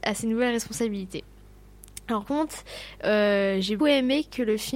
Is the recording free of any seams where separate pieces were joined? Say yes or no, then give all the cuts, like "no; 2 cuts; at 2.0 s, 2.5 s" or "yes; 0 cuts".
no; 2 cuts; at 2.2 s, 3.8 s